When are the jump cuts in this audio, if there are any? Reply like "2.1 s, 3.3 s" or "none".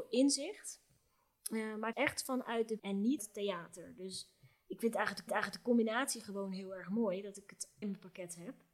1.9 s, 2.8 s, 3.2 s, 5.3 s, 7.8 s

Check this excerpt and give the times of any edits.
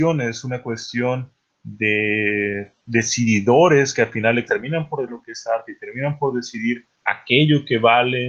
1.5 s, 2.8 s, 4.5 s, 5.1 s, 6.9 s

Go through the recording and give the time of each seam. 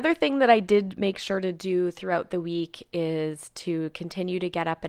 none

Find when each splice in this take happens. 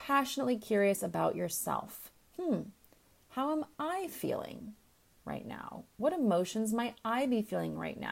none

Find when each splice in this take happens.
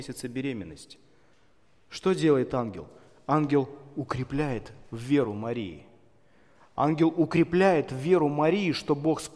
none

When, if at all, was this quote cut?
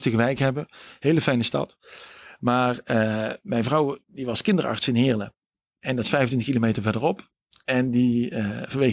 none

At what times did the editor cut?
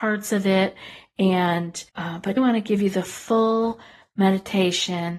1.9 s, 2.4 s

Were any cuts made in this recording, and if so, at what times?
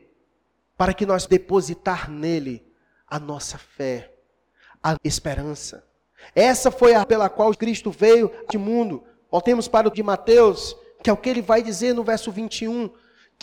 1.3 s, 5.0 s, 7.0 s, 7.5 s, 8.5 s, 9.9 s

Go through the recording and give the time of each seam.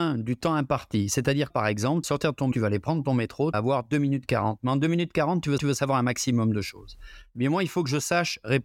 1.5 s, 2.0 s, 2.5 s, 3.5 s, 5.6 s

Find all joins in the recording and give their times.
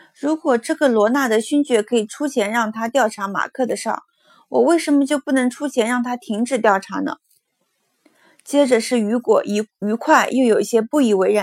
none

